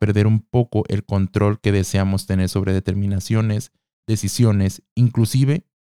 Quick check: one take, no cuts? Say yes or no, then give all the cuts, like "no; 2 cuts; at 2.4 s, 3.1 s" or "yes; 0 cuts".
yes; 0 cuts